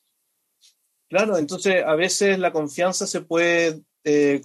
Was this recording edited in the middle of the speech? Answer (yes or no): no